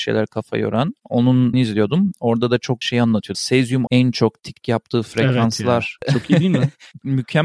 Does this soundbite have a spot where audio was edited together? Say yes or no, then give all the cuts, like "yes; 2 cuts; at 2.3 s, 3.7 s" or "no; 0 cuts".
yes; 5 cuts; at 1.5 s, 2.8 s, 3.3 s, 3.9 s, 4.6 s